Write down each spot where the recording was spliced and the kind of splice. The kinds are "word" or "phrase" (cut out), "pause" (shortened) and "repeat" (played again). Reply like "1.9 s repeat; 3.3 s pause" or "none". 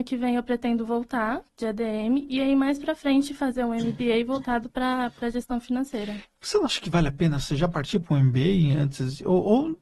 1.5 s pause